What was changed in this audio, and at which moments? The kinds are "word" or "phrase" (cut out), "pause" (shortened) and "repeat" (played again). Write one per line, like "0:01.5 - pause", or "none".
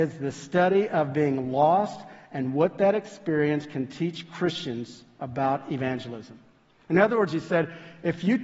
none

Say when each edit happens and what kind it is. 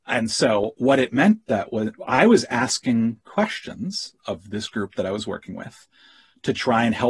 none

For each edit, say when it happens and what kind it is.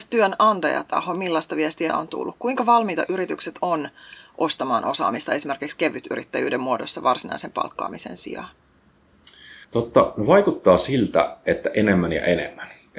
0:01.9 - word
0:09.6 - pause

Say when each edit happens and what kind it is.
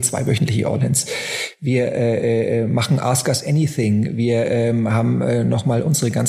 none

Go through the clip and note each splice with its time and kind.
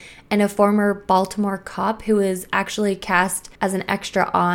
0:03.5 - pause

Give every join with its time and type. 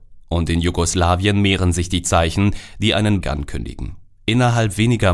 0:03.2 - word

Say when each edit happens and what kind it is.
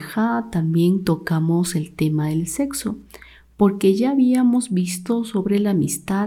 none

